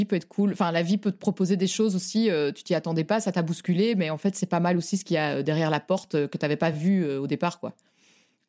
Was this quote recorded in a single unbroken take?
yes; 0 cuts

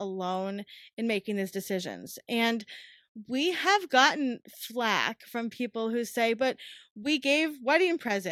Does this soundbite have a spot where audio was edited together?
no; 0 cuts

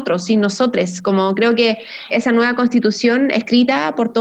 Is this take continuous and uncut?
no; 1 cut; at 2.1 s

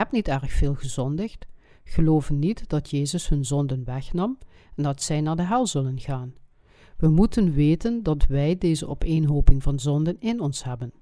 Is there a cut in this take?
no; 0 cuts

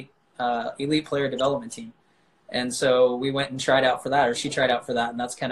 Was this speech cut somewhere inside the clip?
no; 0 cuts

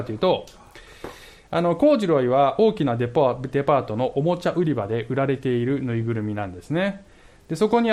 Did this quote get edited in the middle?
no; 0 cuts

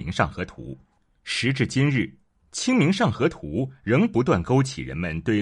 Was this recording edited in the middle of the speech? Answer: no; 0 cuts

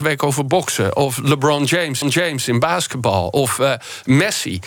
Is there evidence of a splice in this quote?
yes; 1 cut; at 2.0 s

